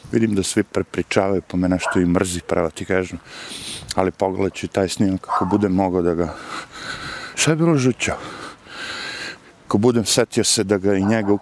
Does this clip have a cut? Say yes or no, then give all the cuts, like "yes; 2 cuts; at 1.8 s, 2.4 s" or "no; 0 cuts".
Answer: no; 0 cuts